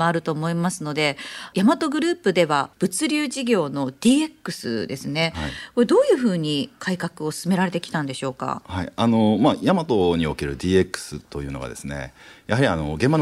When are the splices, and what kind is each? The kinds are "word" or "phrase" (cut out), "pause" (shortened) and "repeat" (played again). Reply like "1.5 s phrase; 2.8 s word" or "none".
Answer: none